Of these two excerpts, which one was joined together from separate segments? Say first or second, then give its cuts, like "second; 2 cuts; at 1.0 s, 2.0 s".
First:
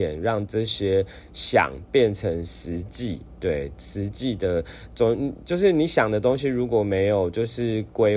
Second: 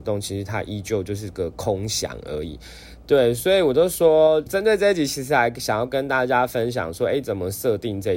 second; 1 cut; at 4.5 s